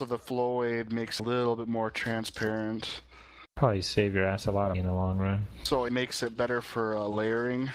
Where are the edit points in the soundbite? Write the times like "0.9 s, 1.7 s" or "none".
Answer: 1.2 s, 4.7 s, 5.9 s